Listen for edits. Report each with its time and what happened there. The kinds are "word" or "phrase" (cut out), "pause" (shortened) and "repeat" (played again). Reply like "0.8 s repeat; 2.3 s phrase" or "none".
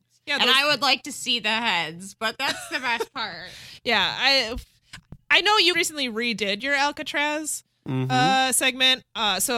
5.7 s word